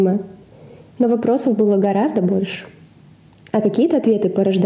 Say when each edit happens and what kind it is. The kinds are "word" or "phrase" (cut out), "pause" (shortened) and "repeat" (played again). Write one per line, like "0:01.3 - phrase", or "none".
none

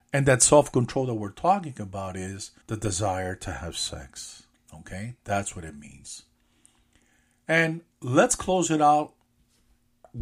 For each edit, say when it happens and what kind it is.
0:02.6 - pause
0:04.5 - pause
0:07.9 - pause

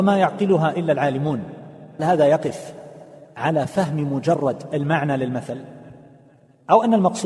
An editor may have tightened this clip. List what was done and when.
0:02.0 - word

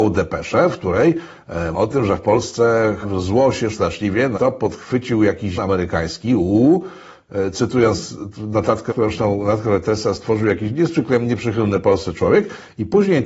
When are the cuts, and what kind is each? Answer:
0:01.7 - word
0:03.0 - word
0:03.7 - word
0:04.3 - word
0:05.6 - word
0:08.9 - word

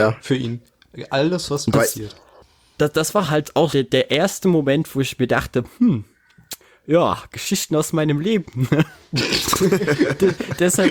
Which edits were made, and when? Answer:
0:03.7 - word

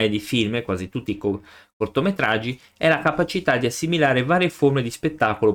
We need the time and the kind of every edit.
none

